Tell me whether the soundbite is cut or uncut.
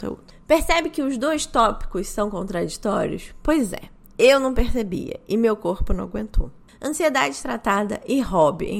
uncut